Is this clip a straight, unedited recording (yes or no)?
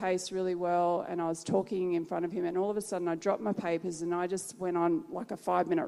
yes